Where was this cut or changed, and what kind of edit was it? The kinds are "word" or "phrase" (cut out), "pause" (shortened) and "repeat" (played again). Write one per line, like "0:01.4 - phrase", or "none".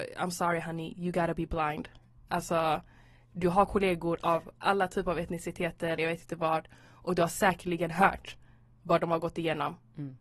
0:06.0 - word